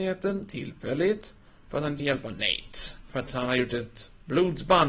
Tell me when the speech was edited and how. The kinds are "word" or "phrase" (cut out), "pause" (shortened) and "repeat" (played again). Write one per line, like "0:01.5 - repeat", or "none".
0:02.0 - word